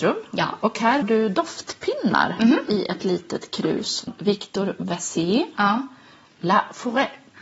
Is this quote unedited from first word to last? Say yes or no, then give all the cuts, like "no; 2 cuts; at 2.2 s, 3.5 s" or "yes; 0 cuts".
no; 2 cuts; at 1.0 s, 4.1 s